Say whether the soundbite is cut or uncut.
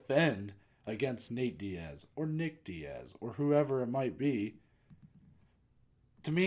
cut